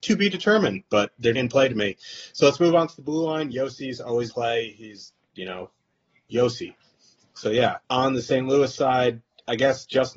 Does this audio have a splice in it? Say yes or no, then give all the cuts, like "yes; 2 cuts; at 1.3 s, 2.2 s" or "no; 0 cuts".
yes; 3 cuts; at 1.3 s, 4.3 s, 7.8 s